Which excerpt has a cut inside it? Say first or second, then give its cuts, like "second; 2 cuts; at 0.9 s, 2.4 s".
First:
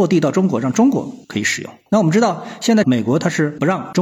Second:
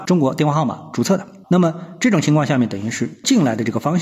first; 1 cut; at 1.2 s